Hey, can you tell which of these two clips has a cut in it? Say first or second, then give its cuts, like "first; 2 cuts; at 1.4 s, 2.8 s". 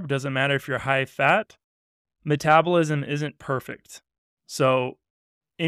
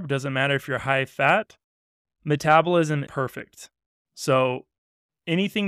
second; 1 cut; at 3.1 s